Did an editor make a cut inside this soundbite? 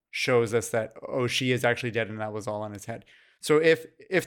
no; 0 cuts

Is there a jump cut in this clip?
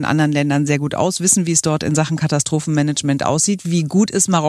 no; 0 cuts

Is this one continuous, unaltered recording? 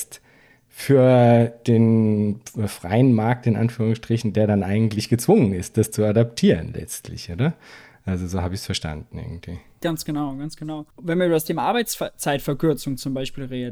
no; 1 cut; at 10.9 s

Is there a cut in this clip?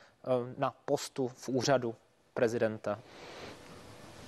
no; 0 cuts

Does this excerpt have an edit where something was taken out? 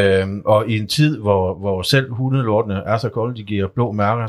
no; 0 cuts

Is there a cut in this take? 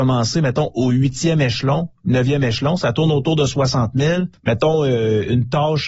yes; 2 cuts; at 2.0 s, 4.4 s

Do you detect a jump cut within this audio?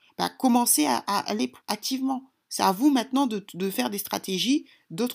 yes; 1 cut; at 1.6 s

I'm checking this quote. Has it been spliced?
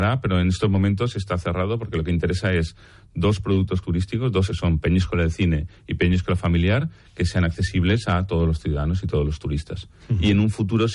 yes; 2 cuts; at 3.8 s, 4.5 s

